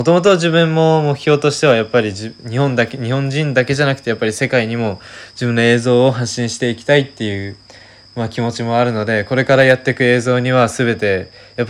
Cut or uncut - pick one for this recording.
uncut